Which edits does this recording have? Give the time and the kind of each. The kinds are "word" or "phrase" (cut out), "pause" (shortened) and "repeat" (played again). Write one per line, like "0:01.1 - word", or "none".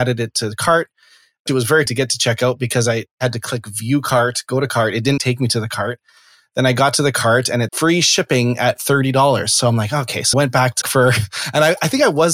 0:01.5 - word
0:01.9 - word
0:05.2 - word
0:07.7 - word
0:10.3 - word
0:10.8 - word